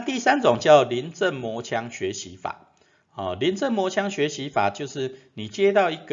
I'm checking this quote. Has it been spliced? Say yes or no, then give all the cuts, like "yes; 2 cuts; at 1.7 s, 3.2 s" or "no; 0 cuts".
no; 0 cuts